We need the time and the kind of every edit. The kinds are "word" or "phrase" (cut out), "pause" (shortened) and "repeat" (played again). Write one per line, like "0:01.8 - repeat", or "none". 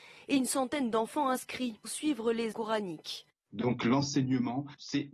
0:01.8 - word
0:02.5 - word